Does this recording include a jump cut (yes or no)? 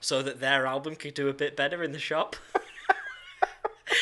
no